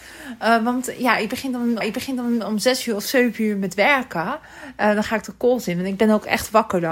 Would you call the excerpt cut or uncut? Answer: cut